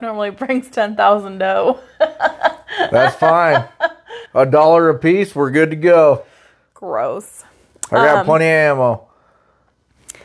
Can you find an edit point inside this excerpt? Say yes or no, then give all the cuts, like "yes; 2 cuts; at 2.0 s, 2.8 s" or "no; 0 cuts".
yes; 1 cut; at 4.3 s